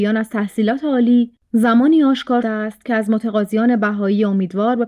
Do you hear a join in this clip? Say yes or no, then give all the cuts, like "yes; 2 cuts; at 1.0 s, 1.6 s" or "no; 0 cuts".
yes; 1 cut; at 2.4 s